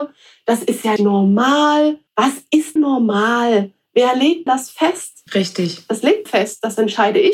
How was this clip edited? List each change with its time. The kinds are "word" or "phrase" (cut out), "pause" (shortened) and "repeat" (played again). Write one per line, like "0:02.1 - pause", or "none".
0:01.0 - word
0:02.1 - pause
0:02.8 - word
0:04.5 - word
0:05.3 - pause
0:06.3 - word